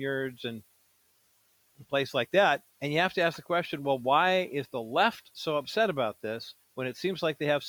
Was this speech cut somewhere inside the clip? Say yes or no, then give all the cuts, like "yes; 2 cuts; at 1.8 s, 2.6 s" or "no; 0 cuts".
yes; 2 cuts; at 2.7 s, 6.6 s